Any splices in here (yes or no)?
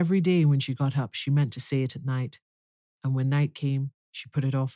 no